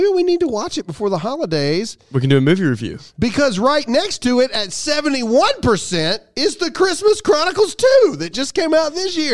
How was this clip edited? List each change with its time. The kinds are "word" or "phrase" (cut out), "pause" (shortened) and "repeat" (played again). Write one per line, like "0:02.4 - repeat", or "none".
none